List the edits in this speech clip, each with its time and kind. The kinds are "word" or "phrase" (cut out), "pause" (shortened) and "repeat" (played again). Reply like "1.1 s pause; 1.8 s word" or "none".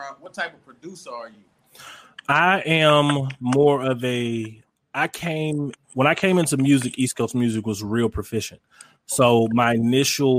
none